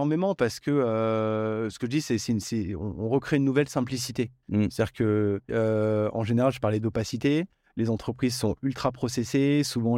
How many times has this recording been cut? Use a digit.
1